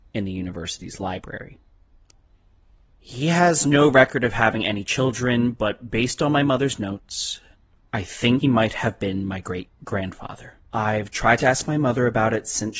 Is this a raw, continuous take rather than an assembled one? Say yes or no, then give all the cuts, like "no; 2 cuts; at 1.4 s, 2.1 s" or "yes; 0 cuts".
no; 3 cuts; at 7.8 s, 8.4 s, 10.6 s